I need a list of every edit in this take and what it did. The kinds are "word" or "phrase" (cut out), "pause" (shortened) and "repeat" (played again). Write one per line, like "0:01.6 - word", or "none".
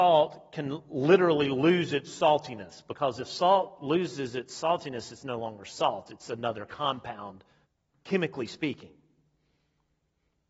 0:07.6 - pause